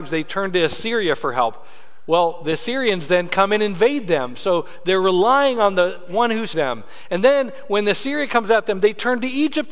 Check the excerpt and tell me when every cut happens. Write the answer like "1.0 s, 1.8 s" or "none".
6.5 s